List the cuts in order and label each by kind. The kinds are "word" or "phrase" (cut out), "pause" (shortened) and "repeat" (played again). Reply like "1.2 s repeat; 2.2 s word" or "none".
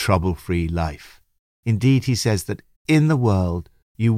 none